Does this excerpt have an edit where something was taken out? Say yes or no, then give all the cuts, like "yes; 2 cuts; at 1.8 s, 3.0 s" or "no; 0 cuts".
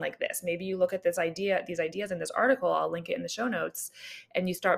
no; 0 cuts